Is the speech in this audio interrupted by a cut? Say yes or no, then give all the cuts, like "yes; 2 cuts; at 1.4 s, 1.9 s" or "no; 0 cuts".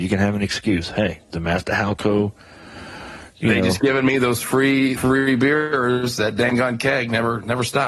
yes; 2 cuts; at 3.8 s, 5.0 s